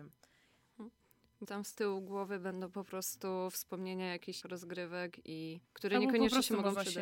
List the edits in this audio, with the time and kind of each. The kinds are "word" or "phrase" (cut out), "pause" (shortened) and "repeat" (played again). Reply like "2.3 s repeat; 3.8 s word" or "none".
1.4 s word; 4.4 s word; 5.7 s pause